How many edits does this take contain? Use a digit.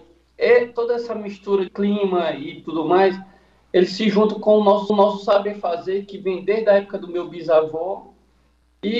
2